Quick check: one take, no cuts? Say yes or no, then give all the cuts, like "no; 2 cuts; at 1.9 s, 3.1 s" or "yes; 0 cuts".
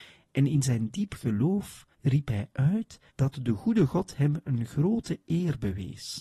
no; 2 cuts; at 1.9 s, 3.1 s